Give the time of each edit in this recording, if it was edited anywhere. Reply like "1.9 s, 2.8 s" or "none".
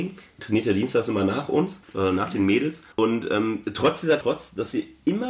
1.8 s, 2.9 s, 4.2 s